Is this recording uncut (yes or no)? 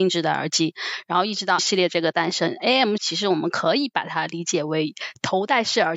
no